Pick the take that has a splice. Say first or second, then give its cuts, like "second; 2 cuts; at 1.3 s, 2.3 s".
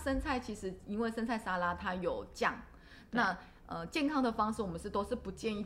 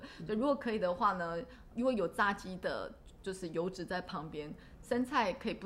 second; 1 cut; at 1.7 s